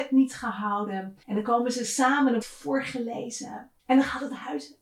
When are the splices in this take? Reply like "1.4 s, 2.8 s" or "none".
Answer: 1.2 s, 2.4 s, 3.8 s

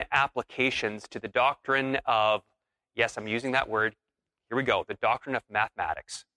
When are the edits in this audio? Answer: none

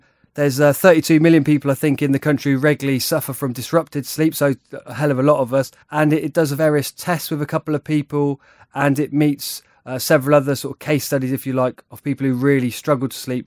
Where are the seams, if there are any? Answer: 5.8 s

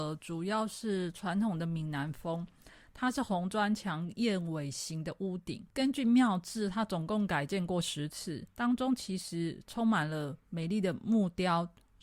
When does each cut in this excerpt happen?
5.7 s, 8.5 s, 10.4 s

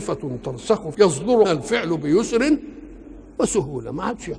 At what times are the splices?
0.9 s, 1.4 s

